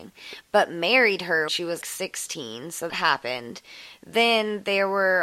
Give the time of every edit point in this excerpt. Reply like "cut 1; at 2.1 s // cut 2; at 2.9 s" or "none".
cut 1; at 1.5 s // cut 2; at 1.8 s // cut 3; at 2.9 s